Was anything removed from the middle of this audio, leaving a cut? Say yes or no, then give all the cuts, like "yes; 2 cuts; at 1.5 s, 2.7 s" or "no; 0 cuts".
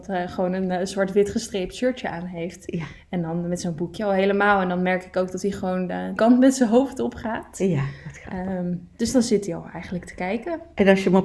yes; 1 cut; at 6.2 s